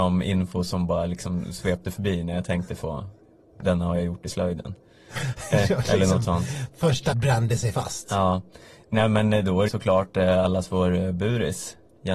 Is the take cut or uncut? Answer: cut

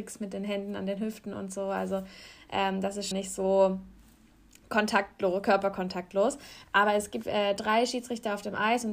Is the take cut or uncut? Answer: cut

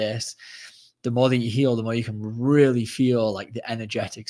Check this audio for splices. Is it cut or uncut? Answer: uncut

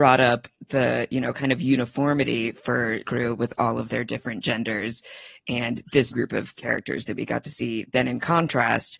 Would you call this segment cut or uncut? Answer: cut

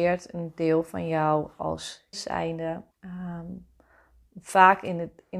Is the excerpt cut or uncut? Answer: cut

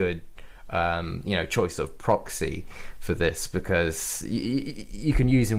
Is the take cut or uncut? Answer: uncut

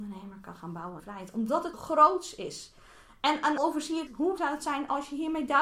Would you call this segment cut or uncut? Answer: cut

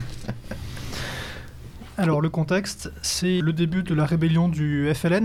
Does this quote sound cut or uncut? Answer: cut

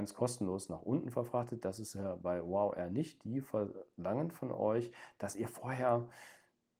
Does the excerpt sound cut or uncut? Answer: uncut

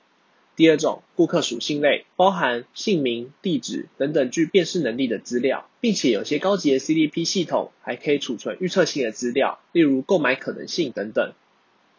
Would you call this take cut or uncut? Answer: cut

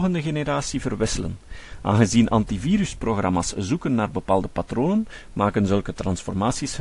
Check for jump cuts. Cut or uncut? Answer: uncut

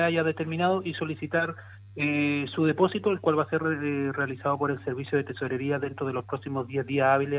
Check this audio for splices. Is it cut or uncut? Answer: uncut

